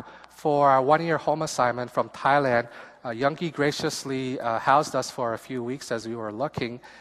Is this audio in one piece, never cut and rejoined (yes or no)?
yes